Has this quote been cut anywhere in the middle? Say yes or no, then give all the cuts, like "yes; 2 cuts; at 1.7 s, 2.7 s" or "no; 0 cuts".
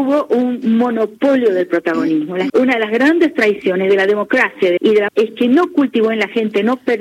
yes; 3 cuts; at 2.5 s, 4.8 s, 5.1 s